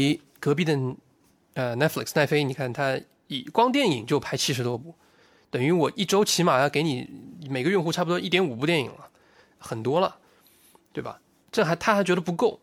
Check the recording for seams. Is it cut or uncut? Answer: uncut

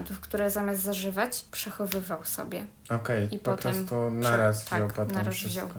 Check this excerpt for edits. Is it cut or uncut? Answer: cut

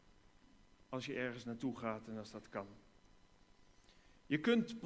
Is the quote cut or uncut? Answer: uncut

